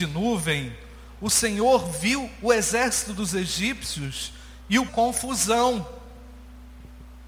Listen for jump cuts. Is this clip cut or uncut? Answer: cut